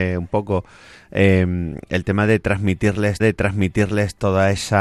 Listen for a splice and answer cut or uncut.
cut